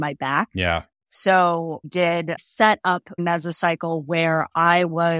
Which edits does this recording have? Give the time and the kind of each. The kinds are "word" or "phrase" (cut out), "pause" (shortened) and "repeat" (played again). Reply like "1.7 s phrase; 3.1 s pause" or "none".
1.8 s word; 2.4 s word; 3.2 s word